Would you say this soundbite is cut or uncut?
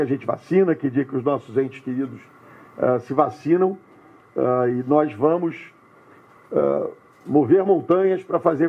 uncut